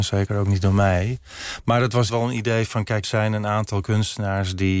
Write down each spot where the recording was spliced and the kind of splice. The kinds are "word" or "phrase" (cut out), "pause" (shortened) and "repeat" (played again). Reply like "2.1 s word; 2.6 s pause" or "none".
2.1 s word; 3.0 s word